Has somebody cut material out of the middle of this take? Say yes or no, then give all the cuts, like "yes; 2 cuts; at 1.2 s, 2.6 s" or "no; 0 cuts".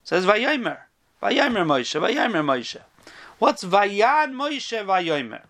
no; 0 cuts